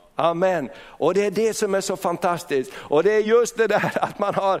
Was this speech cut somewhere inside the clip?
no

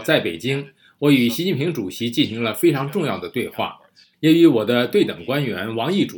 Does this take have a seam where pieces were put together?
no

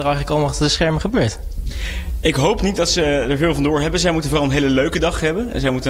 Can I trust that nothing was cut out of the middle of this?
yes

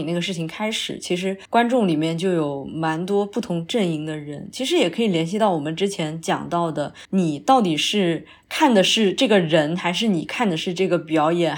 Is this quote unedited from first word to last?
no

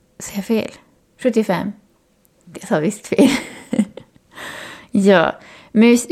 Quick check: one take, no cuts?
yes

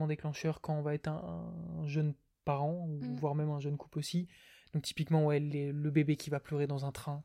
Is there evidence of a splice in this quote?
no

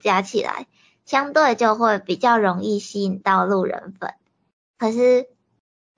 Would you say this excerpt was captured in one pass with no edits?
yes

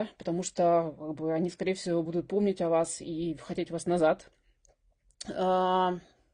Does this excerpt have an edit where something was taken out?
no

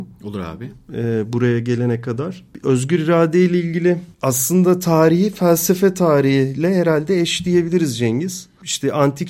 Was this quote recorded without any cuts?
yes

